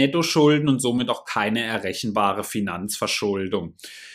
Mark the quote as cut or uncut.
uncut